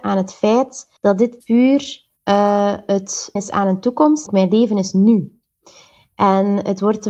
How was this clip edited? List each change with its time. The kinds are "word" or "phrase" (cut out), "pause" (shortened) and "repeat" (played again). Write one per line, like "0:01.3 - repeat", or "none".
0:01.0 - pause
0:01.4 - word
0:02.2 - pause
0:03.4 - word
0:04.3 - phrase